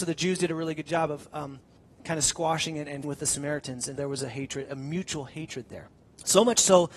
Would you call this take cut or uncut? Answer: cut